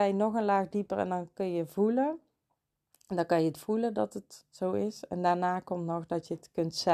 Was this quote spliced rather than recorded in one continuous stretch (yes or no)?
no